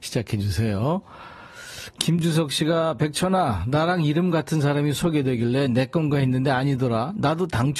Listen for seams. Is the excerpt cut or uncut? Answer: uncut